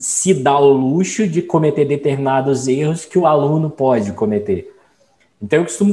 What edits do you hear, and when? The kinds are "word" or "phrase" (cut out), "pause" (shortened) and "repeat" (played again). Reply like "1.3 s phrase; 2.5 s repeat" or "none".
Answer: none